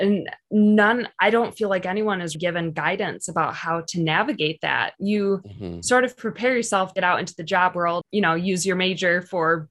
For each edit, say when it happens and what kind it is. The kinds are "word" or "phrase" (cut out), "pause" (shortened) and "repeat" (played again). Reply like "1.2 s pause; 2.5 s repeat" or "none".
2.4 s word; 7.0 s word; 8.0 s word